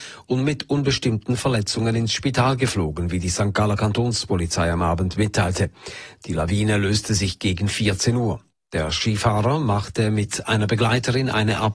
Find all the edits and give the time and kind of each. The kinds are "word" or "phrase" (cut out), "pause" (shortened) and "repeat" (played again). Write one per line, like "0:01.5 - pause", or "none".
none

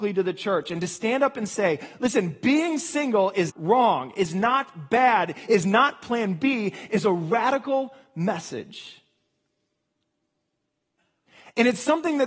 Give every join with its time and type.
0:03.5 - word

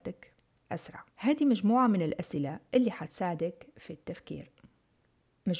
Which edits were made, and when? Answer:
0:01.1 - pause

